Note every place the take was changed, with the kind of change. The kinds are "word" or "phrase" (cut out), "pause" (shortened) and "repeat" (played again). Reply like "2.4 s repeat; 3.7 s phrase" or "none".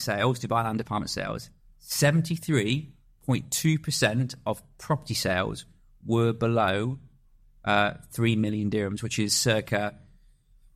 none